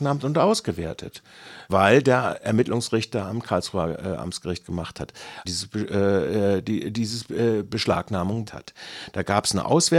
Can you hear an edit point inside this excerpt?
yes; 3 cuts; at 1.7 s, 5.4 s, 8.5 s

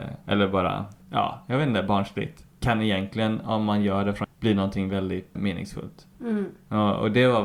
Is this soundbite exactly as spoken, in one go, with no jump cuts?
no; 4 cuts; at 1.0 s, 2.5 s, 4.2 s, 5.3 s

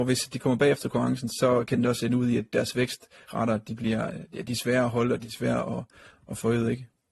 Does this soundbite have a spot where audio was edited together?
no; 0 cuts

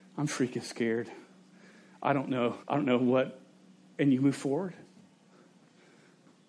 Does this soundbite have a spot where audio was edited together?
yes; 1 cut; at 2.6 s

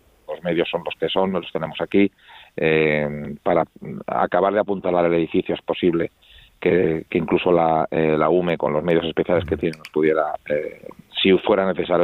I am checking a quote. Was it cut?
no; 0 cuts

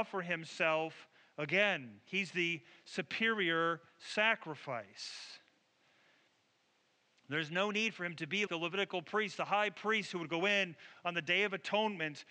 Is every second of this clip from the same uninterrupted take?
no; 1 cut; at 8.5 s

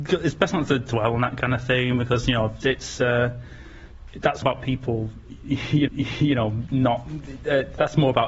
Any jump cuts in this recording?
yes; 3 cuts; at 2.6 s, 4.4 s, 5.9 s

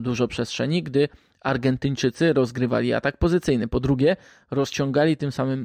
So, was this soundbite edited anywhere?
no; 0 cuts

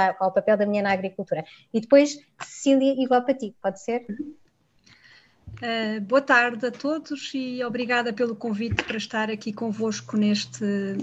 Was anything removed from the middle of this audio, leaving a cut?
no; 0 cuts

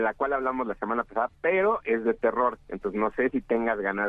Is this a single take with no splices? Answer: yes; 0 cuts

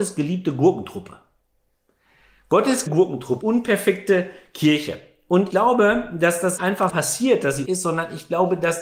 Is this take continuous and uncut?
no; 6 cuts; at 2.9 s, 3.4 s, 5.5 s, 6.6 s, 6.9 s, 7.6 s

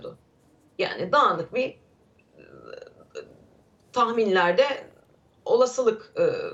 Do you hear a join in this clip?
no; 0 cuts

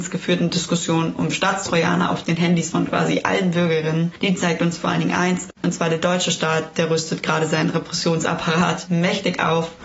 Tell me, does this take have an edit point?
yes; 1 cut; at 5.6 s

